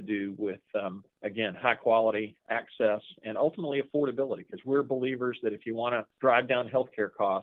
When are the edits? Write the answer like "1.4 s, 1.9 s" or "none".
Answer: 1.1 s, 2.4 s, 6.1 s

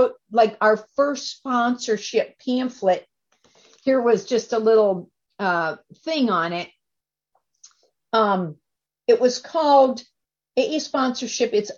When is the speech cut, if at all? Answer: none

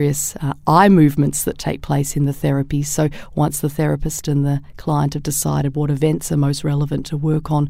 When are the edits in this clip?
none

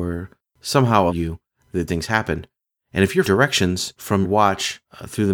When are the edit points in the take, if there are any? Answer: 1.1 s, 1.9 s, 3.2 s, 4.2 s

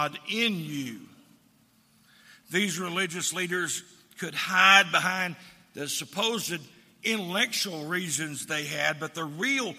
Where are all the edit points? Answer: none

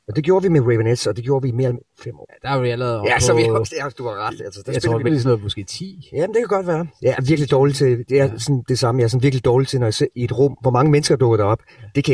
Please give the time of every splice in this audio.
1.7 s, 5.1 s

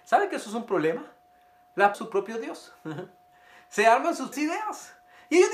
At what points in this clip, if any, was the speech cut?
1.9 s, 4.3 s

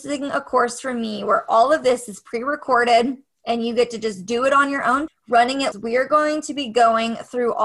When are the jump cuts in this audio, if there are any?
5.1 s, 5.7 s

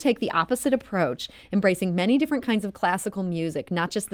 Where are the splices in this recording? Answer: none

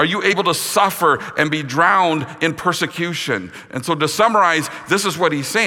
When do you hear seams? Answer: none

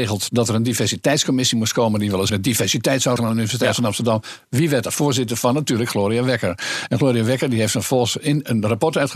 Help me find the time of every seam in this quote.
2.3 s, 3.2 s

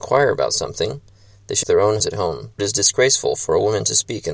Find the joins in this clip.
1.6 s, 2.0 s, 2.6 s

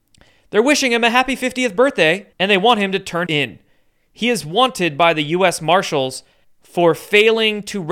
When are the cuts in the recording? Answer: 2.3 s, 3.2 s, 6.4 s

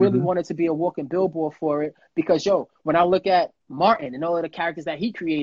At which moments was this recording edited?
3.6 s

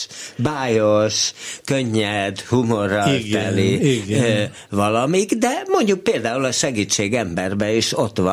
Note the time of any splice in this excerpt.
none

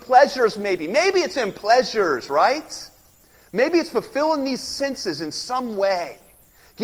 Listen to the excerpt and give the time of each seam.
none

